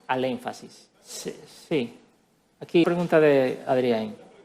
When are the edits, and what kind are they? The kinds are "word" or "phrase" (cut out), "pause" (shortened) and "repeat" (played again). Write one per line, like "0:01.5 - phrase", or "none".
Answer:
0:00.9 - pause
0:02.8 - word